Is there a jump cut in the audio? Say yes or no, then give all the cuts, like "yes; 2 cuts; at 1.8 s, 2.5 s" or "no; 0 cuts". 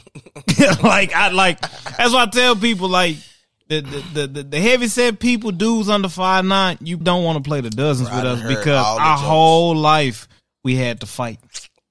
yes; 1 cut; at 7.0 s